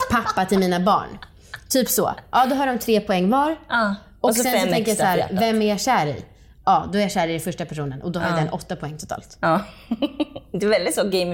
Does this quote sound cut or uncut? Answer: uncut